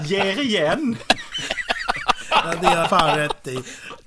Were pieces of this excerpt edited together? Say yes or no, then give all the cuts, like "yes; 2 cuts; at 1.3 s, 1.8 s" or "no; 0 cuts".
yes; 1 cut; at 2.8 s